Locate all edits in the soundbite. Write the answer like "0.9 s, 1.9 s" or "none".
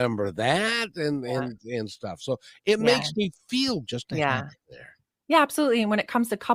3.8 s